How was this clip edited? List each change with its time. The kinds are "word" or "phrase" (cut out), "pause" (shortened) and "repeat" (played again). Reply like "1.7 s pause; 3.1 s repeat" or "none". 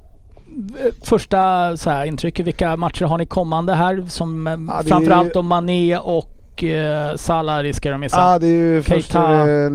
none